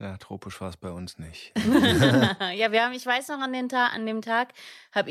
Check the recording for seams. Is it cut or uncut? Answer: uncut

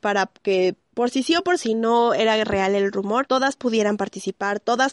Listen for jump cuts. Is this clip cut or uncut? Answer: uncut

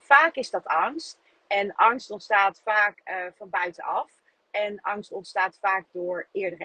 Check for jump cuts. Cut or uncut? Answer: uncut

